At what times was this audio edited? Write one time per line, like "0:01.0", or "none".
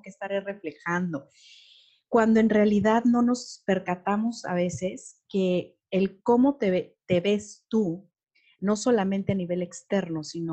none